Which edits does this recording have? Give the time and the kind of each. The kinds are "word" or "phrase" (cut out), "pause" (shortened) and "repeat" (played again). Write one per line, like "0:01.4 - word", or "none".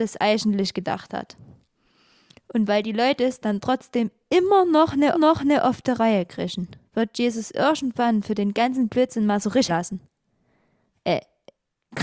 0:05.1 - repeat
0:06.9 - pause
0:09.7 - word